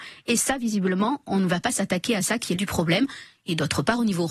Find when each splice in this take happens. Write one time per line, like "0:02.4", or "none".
0:02.6